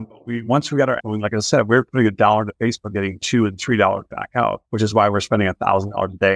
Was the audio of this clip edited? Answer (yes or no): yes